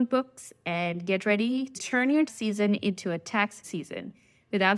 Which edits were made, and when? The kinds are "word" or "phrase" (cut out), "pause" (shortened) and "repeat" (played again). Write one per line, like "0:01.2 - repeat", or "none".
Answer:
0:01.8 - word
0:02.3 - word
0:03.6 - word